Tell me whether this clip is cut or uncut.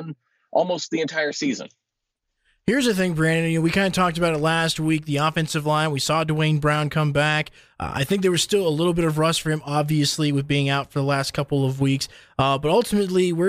uncut